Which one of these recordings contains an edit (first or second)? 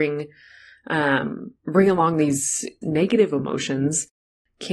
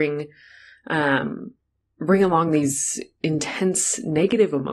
first